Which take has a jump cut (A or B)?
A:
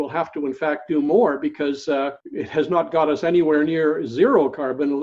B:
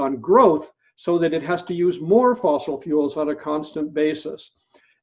A